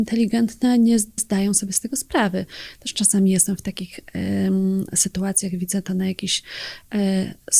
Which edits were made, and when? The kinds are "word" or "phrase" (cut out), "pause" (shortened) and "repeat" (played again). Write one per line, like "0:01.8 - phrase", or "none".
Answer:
0:01.2 - word